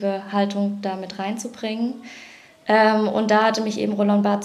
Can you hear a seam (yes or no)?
no